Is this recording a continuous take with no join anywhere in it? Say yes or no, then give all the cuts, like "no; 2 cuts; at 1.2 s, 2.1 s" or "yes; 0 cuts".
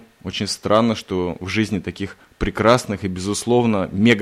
yes; 0 cuts